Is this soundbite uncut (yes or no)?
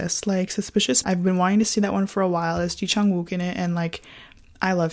no